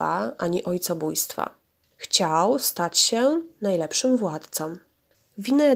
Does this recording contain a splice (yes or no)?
no